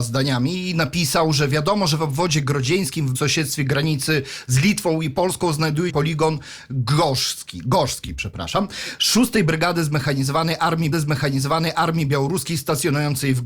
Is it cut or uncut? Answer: cut